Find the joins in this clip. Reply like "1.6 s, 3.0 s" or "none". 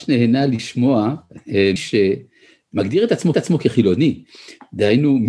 1.8 s, 3.3 s